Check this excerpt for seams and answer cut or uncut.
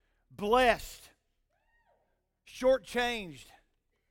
uncut